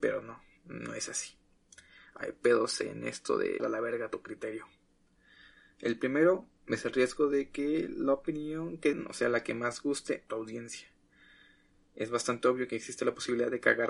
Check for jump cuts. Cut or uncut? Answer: cut